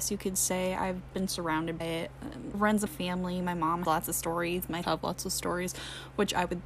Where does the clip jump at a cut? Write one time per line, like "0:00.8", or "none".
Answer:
0:01.1
0:01.8
0:02.5
0:02.9
0:03.8
0:04.8